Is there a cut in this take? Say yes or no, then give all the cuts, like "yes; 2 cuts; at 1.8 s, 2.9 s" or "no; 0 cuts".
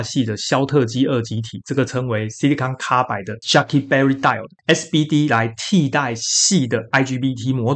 no; 0 cuts